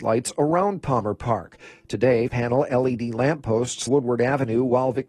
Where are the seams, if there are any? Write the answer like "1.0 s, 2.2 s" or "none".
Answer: 2.3 s, 3.9 s